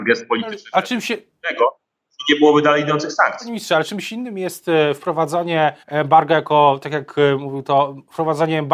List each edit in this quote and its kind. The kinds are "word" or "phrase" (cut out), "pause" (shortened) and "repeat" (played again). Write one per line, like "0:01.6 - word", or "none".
0:05.8 - pause